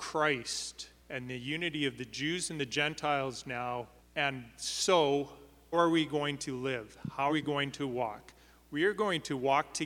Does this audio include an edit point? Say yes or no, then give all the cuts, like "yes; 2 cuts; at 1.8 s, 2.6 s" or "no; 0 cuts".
yes; 4 cuts; at 1.0 s, 4.0 s, 5.7 s, 7.3 s